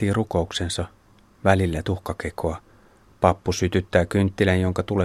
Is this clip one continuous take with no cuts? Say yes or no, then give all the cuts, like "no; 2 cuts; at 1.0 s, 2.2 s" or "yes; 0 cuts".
no; 1 cut; at 1.8 s